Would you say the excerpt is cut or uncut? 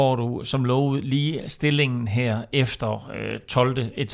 uncut